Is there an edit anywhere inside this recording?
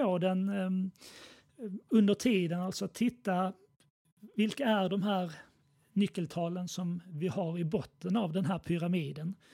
no; 0 cuts

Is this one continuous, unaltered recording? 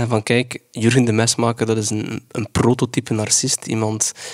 yes; 0 cuts

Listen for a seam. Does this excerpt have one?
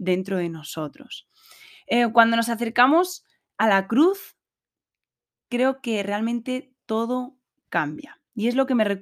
no; 0 cuts

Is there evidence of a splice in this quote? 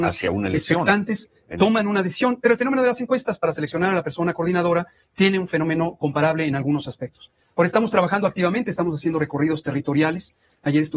no; 0 cuts

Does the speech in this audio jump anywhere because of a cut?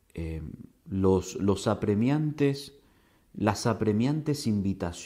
no; 0 cuts

